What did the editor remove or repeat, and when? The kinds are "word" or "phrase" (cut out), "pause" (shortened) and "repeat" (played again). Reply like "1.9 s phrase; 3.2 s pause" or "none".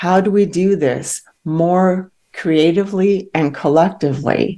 none